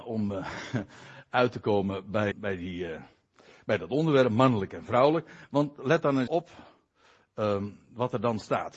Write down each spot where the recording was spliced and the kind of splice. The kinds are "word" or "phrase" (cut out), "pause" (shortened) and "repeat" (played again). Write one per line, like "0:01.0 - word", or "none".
0:02.3 - word
0:06.3 - word